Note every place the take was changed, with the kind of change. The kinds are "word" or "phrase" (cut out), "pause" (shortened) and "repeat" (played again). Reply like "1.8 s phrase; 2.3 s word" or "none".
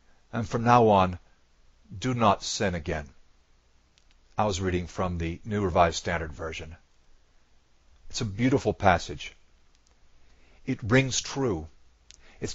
none